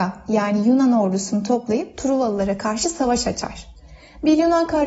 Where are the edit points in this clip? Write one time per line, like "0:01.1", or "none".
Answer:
none